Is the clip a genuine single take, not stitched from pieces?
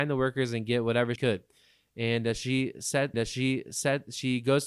no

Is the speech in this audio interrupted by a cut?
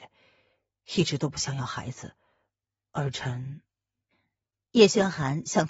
no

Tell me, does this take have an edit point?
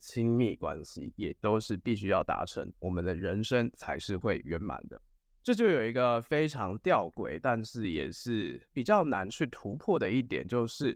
no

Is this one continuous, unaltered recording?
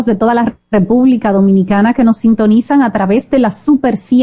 yes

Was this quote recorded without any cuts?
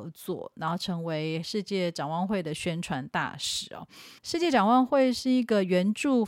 no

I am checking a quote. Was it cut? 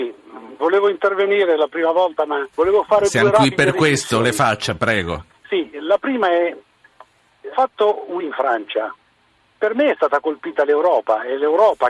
yes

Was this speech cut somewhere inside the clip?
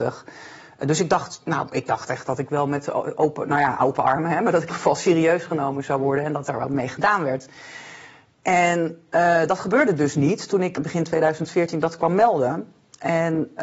yes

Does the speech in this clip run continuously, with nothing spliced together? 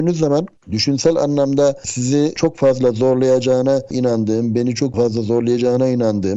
yes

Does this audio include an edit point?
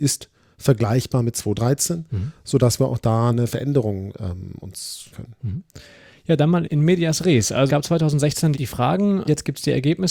yes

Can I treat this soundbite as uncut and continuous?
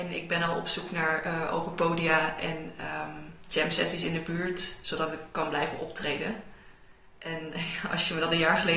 yes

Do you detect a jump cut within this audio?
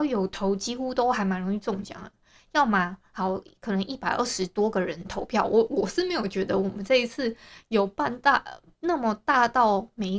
no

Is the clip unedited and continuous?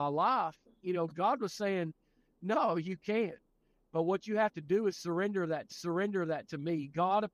no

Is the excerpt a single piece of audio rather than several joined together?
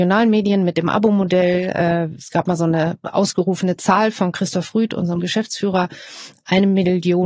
yes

